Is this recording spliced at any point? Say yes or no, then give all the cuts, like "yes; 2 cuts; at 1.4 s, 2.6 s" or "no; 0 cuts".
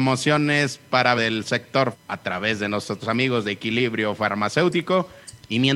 yes; 3 cuts; at 1.2 s, 1.9 s, 3.0 s